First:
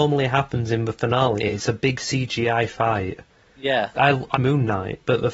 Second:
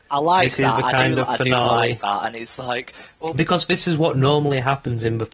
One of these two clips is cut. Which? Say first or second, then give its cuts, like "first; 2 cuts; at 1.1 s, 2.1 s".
first; 3 cuts; at 1.4 s, 3.9 s, 4.3 s